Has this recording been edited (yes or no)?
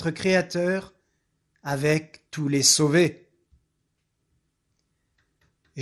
no